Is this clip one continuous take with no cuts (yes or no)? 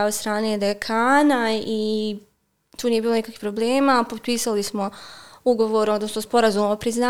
yes